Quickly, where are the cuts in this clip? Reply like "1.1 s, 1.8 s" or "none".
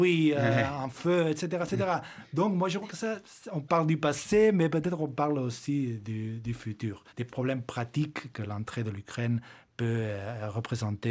7.1 s